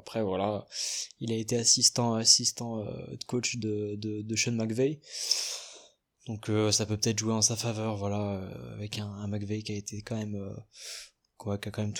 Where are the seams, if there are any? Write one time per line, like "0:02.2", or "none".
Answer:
none